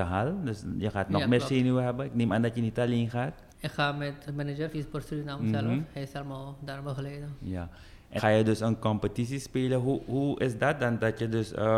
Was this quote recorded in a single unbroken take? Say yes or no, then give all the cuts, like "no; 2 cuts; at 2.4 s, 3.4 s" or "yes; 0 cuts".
no; 4 cuts; at 3.5 s, 4.3 s, 4.7 s, 8.2 s